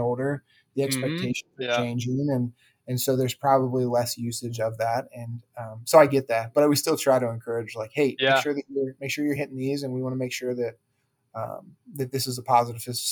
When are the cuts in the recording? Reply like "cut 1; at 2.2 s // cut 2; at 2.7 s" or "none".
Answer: none